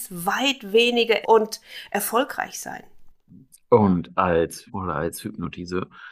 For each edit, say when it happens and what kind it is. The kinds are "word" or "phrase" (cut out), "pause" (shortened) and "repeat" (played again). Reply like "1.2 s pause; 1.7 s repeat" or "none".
1.2 s word; 4.7 s word